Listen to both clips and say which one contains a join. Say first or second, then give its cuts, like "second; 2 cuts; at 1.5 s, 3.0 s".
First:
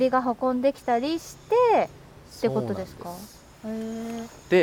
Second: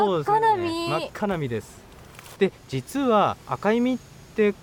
second; 2 cuts; at 2.6 s, 3.4 s